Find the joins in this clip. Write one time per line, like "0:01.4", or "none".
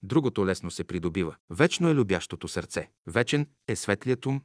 0:01.4
0:03.0

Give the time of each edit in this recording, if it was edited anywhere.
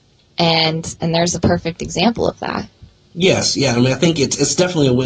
none

